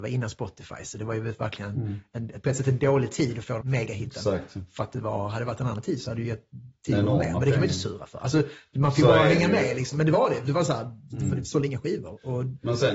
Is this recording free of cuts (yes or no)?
no